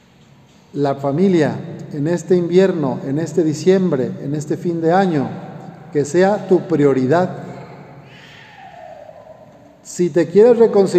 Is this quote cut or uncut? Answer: uncut